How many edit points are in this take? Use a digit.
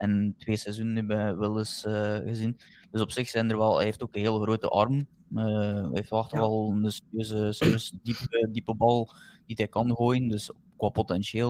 0